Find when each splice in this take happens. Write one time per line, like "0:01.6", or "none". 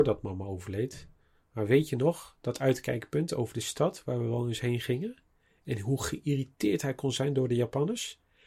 none